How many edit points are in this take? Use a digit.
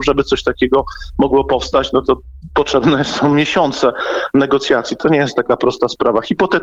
0